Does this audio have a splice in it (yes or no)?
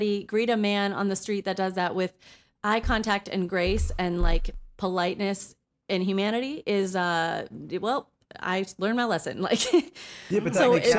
no